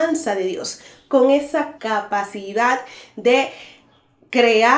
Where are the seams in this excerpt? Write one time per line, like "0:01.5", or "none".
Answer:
0:01.8